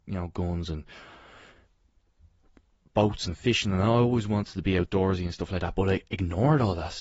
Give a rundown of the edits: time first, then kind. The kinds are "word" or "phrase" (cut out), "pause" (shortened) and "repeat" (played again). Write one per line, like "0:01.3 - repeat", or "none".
none